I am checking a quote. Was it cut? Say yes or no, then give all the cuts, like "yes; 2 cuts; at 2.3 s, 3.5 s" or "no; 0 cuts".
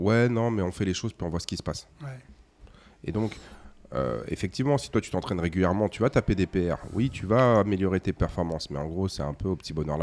yes; 1 cut; at 1.9 s